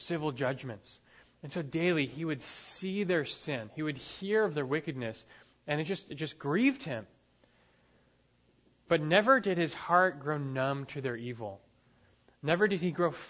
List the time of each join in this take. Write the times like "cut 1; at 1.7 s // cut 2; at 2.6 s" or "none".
none